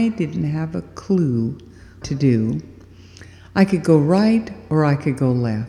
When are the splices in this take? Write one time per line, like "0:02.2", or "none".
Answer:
0:02.0